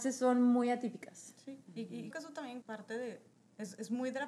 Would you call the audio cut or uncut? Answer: cut